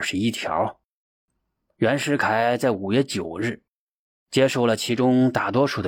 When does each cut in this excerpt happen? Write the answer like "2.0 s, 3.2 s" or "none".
none